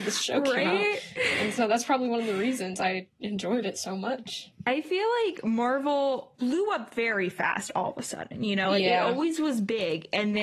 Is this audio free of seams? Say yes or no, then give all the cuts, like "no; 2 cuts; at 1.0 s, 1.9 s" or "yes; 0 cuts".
yes; 0 cuts